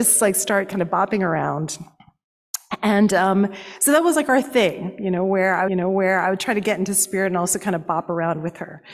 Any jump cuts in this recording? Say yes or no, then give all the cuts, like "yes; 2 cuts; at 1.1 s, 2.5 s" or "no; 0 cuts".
yes; 1 cut; at 5.7 s